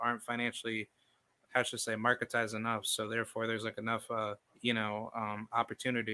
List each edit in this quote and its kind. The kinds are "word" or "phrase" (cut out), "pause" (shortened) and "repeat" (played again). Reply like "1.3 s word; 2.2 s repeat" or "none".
1.5 s word; 4.4 s pause